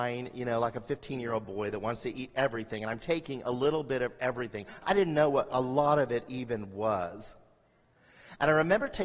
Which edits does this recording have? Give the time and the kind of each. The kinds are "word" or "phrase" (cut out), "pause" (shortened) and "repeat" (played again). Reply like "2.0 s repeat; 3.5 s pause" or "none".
none